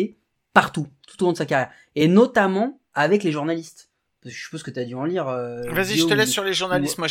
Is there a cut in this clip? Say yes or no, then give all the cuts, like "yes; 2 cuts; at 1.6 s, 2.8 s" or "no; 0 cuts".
no; 0 cuts